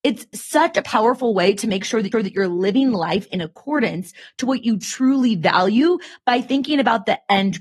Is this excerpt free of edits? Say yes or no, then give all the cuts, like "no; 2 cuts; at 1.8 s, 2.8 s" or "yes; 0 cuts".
no; 1 cut; at 2.1 s